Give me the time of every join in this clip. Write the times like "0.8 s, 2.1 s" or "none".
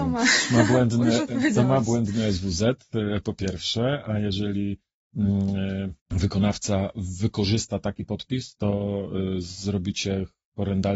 6.0 s